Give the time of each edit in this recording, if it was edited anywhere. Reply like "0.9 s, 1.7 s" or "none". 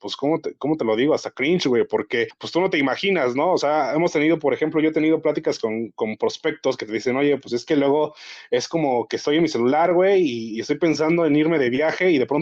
none